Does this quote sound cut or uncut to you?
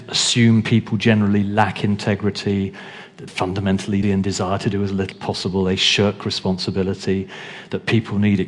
cut